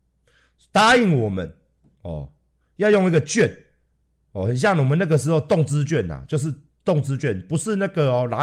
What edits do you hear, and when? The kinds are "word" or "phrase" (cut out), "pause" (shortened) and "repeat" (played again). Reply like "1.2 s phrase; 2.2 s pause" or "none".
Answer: none

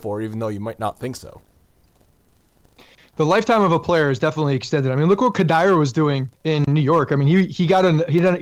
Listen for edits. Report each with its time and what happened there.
6.3 s pause

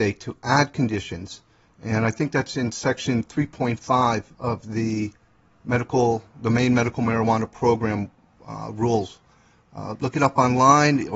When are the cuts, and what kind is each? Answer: none

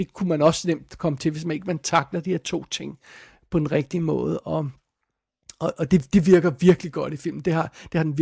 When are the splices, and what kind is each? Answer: none

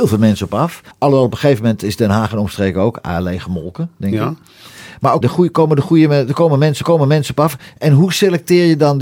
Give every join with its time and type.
0.9 s pause; 5.2 s word; 6.8 s repeat

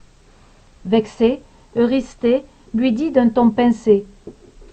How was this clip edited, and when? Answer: none

